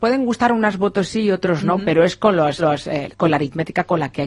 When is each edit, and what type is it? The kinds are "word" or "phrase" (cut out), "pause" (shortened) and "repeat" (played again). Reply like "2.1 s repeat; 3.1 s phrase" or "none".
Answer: 2.6 s repeat